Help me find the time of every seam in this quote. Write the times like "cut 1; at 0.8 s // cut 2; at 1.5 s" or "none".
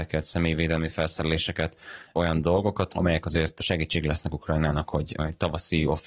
none